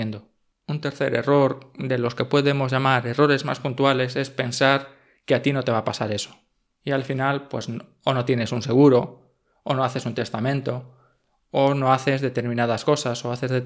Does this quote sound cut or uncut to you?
uncut